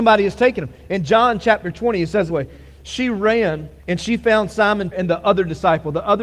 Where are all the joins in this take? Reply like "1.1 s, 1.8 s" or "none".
2.3 s, 3.8 s, 4.9 s